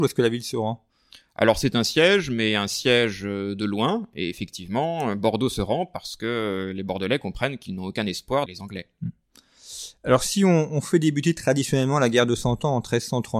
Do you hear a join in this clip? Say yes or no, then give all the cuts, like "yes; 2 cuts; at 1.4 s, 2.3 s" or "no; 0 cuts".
yes; 1 cut; at 8.5 s